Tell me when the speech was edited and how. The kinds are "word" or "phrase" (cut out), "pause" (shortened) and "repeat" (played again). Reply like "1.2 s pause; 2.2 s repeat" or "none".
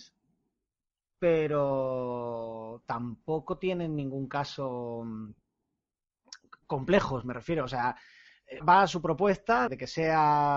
8.6 s word; 9.7 s word